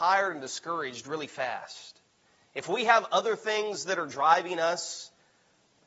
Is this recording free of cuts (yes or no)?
yes